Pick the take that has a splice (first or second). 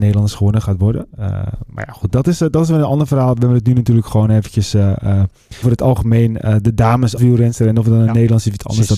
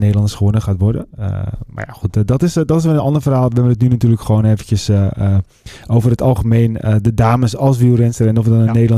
first